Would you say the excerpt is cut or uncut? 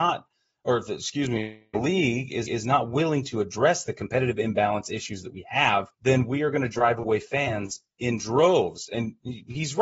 cut